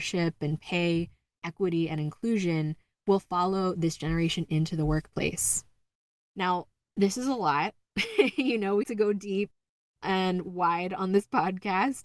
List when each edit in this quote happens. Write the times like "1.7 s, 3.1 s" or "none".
8.8 s